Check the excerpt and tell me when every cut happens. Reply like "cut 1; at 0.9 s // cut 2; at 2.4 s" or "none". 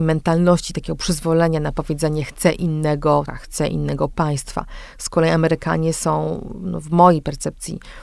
cut 1; at 3.3 s